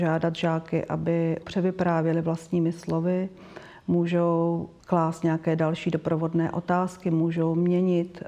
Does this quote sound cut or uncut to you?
cut